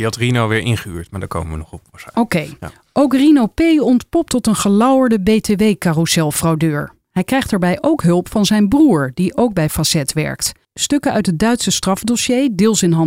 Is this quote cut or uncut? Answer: cut